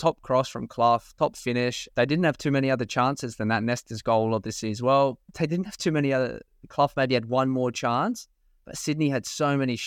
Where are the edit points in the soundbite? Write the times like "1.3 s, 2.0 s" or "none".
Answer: 1.9 s